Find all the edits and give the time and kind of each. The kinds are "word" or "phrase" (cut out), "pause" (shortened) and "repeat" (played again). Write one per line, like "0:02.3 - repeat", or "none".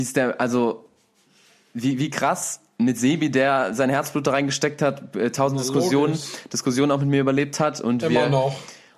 none